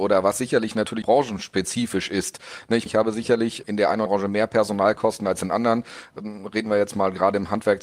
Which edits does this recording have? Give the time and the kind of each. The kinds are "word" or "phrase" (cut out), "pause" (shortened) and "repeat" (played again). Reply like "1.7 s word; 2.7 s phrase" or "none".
1.0 s word; 2.9 s word; 3.6 s word; 4.1 s word